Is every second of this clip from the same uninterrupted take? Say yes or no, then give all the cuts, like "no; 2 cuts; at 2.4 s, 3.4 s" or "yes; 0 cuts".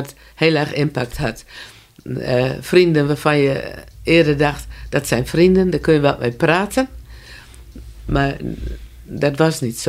yes; 0 cuts